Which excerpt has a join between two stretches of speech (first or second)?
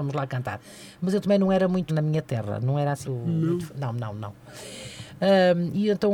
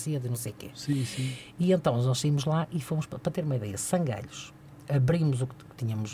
first